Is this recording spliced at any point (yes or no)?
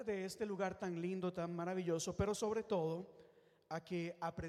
no